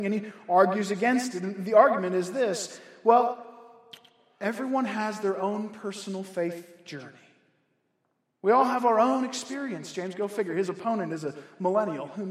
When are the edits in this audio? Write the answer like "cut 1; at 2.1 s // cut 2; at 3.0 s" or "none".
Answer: none